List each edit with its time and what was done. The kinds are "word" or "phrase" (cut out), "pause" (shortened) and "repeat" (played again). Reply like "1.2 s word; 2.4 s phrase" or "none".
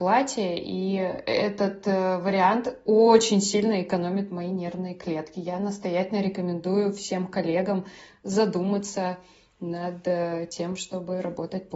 none